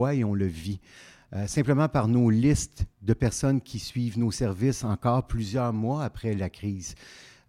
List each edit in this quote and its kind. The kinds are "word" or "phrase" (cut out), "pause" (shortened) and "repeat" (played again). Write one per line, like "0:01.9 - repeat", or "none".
0:02.9 - pause